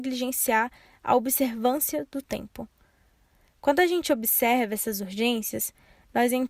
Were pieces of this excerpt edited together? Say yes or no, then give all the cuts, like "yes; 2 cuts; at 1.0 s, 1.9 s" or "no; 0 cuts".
no; 0 cuts